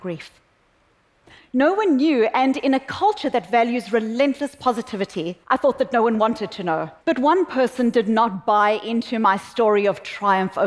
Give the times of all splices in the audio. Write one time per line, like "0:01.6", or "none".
0:05.4
0:07.0